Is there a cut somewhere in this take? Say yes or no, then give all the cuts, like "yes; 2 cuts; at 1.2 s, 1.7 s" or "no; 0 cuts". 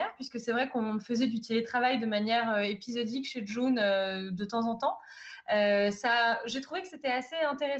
no; 0 cuts